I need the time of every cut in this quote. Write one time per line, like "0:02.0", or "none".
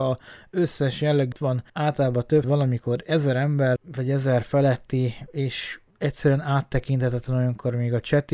0:01.3
0:01.7
0:02.4
0:03.8